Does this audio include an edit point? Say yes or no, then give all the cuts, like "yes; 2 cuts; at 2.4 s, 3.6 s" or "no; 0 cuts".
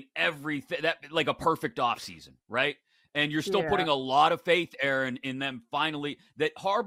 no; 0 cuts